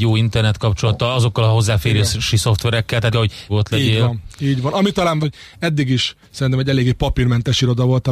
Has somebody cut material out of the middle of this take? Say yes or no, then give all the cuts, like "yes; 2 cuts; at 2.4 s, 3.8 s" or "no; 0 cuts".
yes; 4 cuts; at 3.1 s, 3.5 s, 5.2 s, 6.2 s